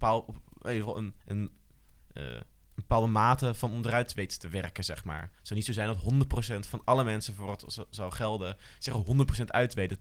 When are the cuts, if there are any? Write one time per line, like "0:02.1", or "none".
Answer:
0:01.2